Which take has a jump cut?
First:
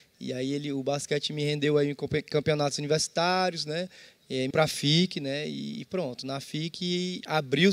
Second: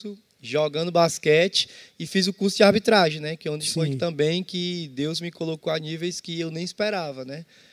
first; 1 cut; at 4.5 s

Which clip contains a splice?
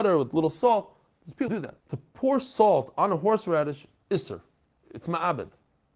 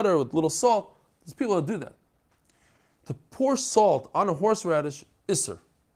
first; 2 cuts; at 1.5 s, 1.8 s

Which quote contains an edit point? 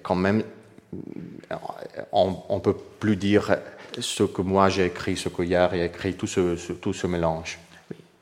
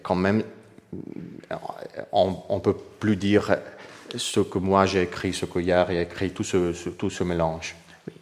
first; 1 cut; at 3.9 s

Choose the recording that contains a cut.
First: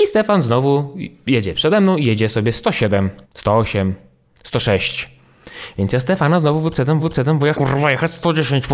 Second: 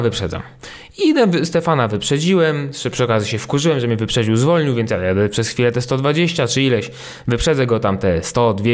first; 3 cuts; at 3.2 s, 7.0 s, 7.5 s

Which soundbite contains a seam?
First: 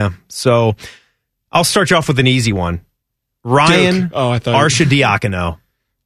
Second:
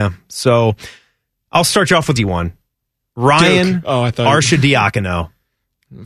second; 1 cut; at 2.2 s

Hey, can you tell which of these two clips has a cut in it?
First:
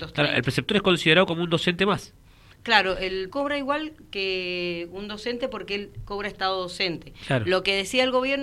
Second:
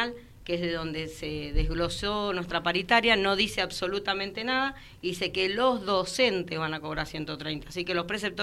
first; 2 cuts; at 2.6 s, 3.3 s

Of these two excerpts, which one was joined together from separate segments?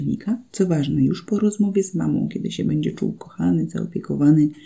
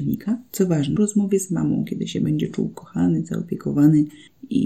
second; 1 cut; at 1.0 s

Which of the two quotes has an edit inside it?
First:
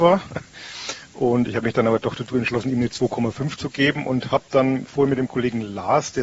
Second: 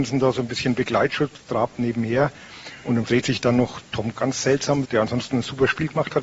second; 3 cuts; at 3.0 s, 4.1 s, 4.8 s

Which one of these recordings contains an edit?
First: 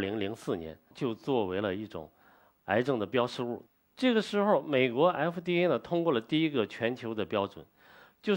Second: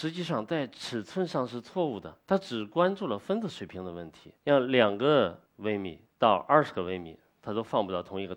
second; 4 cuts; at 2.2 s, 4.4 s, 5.5 s, 6.1 s

